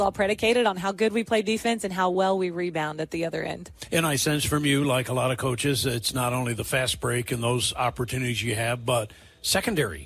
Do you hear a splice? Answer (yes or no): no